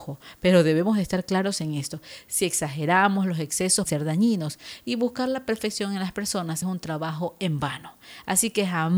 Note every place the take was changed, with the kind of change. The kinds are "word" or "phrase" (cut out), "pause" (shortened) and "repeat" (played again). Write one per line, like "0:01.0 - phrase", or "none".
0:03.9 - word
0:06.6 - word